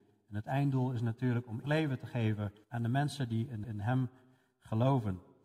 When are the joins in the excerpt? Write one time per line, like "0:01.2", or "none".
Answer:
0:01.6
0:02.6
0:03.6